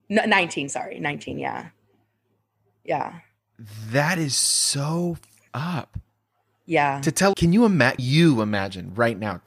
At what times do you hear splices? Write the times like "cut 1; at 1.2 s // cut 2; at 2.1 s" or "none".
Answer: cut 1; at 5.5 s // cut 2; at 7.3 s // cut 3; at 8.0 s